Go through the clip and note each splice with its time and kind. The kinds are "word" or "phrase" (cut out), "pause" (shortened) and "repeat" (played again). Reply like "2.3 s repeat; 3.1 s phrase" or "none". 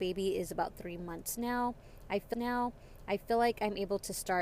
2.3 s repeat